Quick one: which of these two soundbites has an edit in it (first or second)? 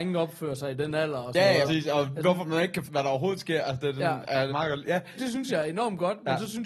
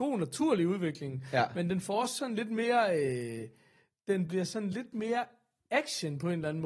first